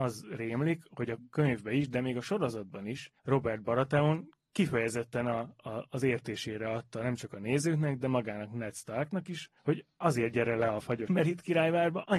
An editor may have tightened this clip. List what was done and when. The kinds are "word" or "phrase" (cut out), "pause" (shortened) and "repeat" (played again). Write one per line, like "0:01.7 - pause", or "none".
0:03.2 - pause
0:04.4 - pause
0:09.6 - pause
0:11.1 - word

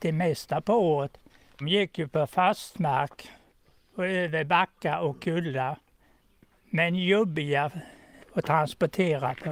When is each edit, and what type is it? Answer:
0:01.6 - word

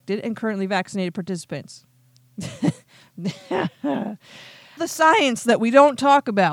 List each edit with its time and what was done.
0:04.8 - word

